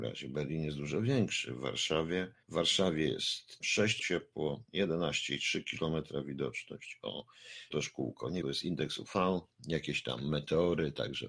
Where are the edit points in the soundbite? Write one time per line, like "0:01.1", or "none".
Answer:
0:02.4
0:03.6
0:04.0
0:07.7
0:08.4